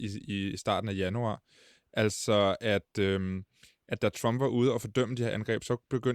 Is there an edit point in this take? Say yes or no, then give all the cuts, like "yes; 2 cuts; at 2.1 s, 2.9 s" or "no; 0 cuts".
no; 0 cuts